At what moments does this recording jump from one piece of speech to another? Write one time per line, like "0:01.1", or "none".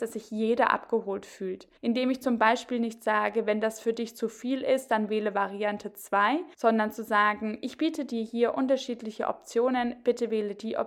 0:01.8
0:06.5